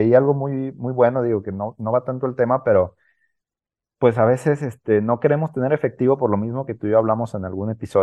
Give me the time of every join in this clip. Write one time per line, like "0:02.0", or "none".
none